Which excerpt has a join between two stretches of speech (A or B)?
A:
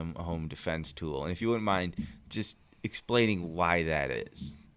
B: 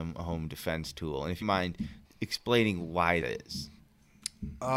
B